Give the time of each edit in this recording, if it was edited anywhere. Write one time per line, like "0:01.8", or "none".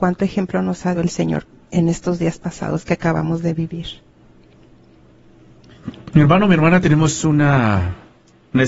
0:00.9